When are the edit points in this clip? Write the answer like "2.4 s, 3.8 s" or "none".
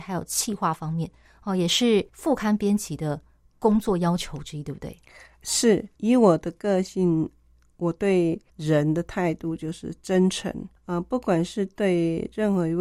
2.1 s, 5.9 s, 8.5 s, 10.8 s